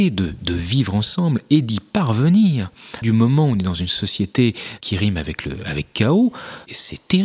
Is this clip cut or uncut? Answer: cut